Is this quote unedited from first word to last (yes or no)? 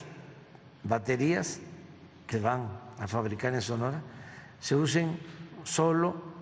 no